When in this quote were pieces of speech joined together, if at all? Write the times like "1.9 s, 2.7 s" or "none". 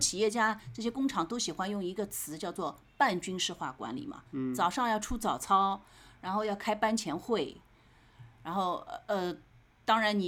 4.3 s